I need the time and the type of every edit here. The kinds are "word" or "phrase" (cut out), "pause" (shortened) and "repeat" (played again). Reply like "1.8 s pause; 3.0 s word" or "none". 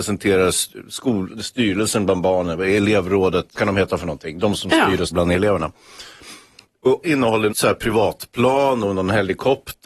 3.5 s word; 5.1 s word; 7.0 s word; 7.5 s word